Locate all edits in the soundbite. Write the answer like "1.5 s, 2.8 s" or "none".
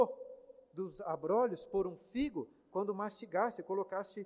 none